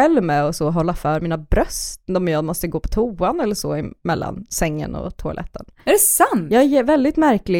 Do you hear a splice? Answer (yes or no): no